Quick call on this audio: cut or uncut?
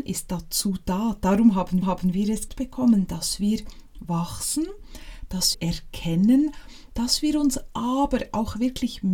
cut